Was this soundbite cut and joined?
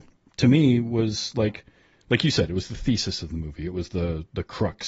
no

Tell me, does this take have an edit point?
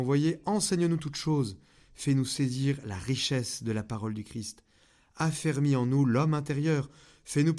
no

